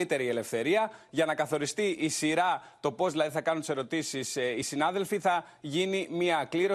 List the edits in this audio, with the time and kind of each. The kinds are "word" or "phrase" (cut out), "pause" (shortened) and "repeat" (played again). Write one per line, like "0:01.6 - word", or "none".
none

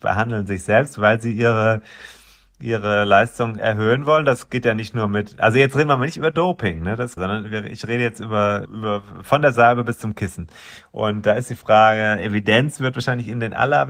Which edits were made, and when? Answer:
0:03.6 - word
0:07.2 - word
0:08.6 - word

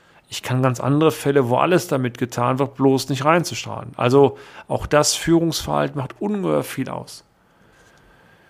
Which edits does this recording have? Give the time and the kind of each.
none

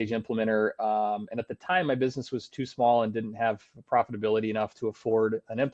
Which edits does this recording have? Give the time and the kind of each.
none

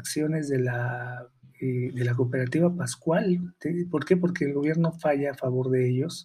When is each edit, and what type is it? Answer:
0:01.4 - pause

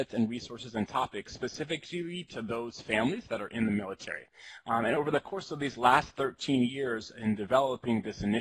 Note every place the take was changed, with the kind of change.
none

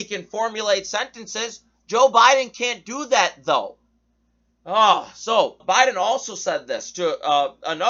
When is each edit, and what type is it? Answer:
0:05.6 - word

